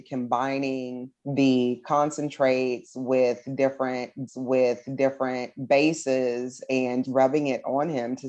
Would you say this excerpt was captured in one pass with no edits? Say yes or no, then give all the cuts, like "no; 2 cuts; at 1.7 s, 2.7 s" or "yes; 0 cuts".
no; 3 cuts; at 1.2 s, 4.3 s, 7.0 s